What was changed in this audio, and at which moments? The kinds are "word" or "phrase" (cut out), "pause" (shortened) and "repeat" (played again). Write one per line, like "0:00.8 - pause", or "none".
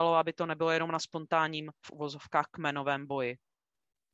0:01.8 - word